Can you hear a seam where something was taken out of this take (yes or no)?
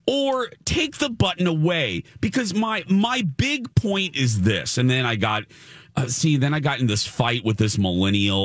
no